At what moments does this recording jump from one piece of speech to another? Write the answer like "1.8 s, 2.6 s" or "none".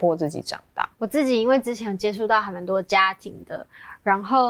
0.9 s